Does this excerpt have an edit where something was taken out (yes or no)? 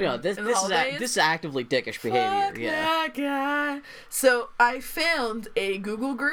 no